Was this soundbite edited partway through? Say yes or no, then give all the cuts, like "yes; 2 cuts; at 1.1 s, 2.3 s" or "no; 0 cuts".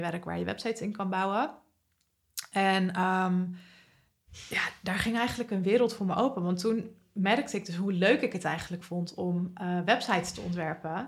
no; 0 cuts